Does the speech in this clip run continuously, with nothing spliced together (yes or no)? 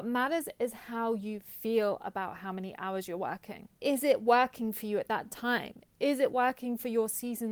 no